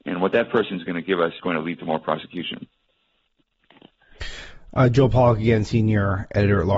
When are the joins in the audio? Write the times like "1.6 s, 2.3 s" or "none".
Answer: 1.4 s